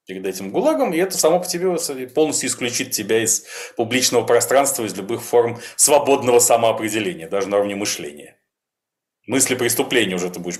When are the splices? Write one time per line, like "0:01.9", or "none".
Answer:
none